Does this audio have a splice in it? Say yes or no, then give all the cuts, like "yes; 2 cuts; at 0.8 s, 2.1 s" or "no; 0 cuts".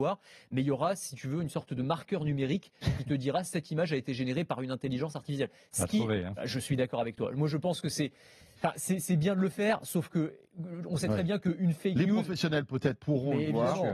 no; 0 cuts